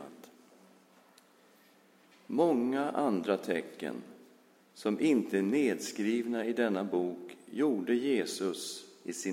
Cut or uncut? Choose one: uncut